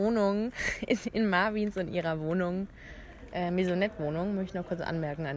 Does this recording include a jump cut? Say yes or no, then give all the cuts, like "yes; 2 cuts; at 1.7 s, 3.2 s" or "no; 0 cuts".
no; 0 cuts